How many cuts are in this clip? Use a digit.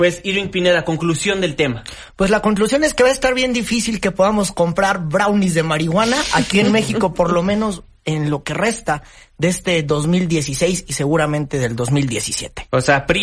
0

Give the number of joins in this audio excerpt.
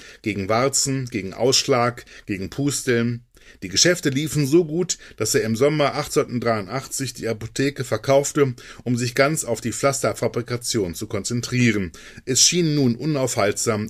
0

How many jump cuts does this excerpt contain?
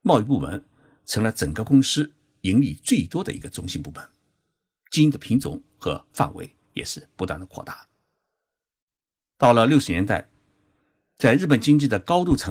0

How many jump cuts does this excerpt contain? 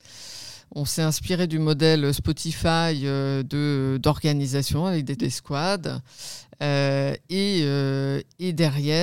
1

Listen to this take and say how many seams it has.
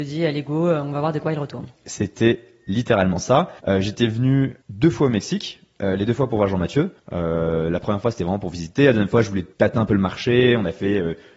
4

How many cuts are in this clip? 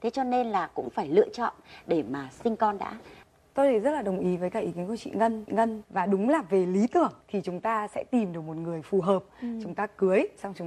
3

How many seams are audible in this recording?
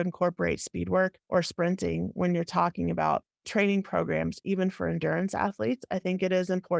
1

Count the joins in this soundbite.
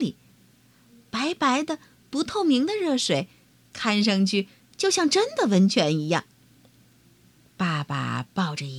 0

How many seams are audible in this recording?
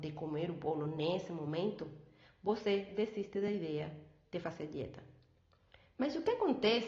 0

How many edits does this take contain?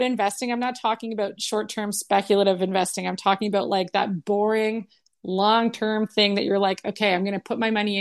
0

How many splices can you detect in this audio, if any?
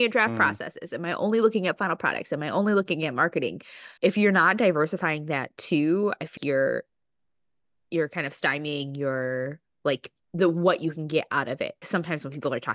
4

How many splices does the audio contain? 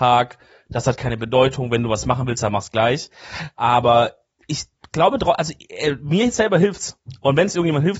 0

